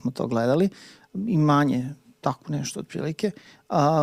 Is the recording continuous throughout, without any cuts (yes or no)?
yes